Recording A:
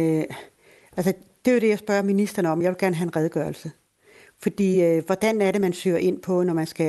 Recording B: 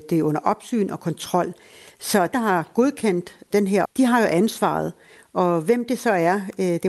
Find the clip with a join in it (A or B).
B